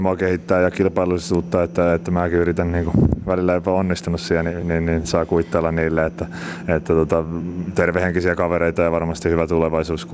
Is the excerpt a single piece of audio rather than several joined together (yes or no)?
yes